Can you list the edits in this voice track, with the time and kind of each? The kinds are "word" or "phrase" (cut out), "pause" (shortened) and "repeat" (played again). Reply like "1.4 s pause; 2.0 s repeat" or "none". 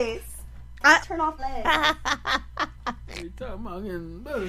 1.0 s word; 1.4 s phrase